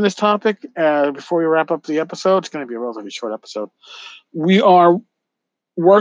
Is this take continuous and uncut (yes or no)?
yes